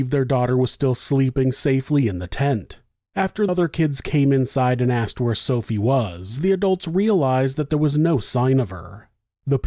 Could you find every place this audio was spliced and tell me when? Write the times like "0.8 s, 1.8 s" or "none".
3.5 s